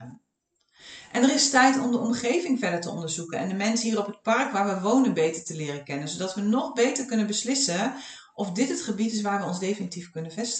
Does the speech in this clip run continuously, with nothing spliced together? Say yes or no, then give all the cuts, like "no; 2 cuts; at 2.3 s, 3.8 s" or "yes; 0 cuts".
yes; 0 cuts